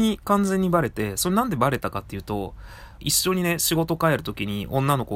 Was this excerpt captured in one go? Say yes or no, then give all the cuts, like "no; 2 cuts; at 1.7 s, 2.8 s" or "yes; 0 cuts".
no; 1 cut; at 3.0 s